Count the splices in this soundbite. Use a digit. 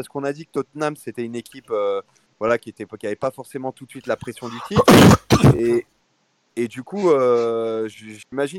0